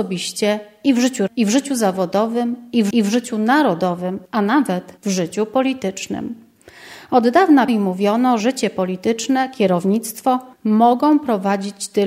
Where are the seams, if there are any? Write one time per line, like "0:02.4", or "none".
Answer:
0:01.3
0:02.9
0:04.3
0:05.0
0:07.7
0:08.4
0:10.5